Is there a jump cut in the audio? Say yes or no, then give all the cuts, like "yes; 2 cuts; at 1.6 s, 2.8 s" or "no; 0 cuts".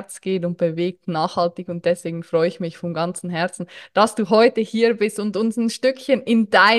no; 0 cuts